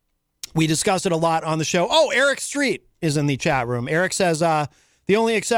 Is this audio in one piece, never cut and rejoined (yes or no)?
yes